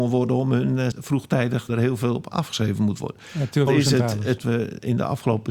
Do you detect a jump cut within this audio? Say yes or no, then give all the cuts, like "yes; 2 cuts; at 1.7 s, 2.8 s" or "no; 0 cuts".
yes; 4 cuts; at 0.9 s, 1.7 s, 3.7 s, 4.4 s